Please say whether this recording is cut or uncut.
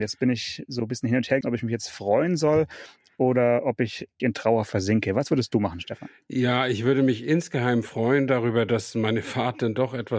cut